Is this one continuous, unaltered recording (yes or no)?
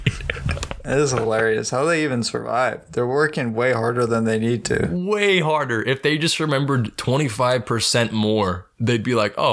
yes